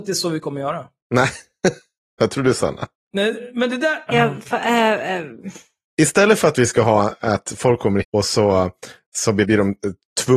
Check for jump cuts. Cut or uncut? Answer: cut